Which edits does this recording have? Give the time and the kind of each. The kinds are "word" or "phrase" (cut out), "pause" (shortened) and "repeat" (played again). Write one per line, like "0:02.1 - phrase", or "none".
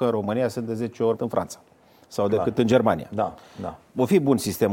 0:01.1 - phrase